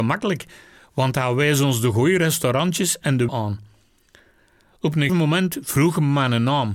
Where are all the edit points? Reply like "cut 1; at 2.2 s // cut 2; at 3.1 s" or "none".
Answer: cut 1; at 3.3 s // cut 2; at 5.1 s